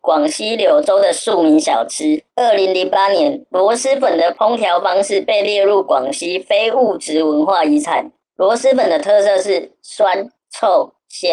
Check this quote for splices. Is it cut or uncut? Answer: cut